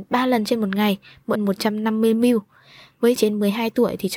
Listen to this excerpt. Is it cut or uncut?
cut